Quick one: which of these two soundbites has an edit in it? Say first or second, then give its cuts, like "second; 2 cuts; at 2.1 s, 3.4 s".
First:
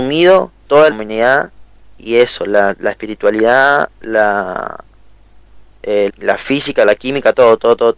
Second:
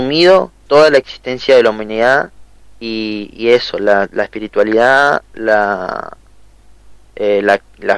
first; 3 cuts; at 0.9 s, 2.0 s, 6.1 s